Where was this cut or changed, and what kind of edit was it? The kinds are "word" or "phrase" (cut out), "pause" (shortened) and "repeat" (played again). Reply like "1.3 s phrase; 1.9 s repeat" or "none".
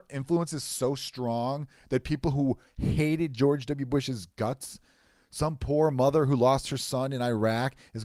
none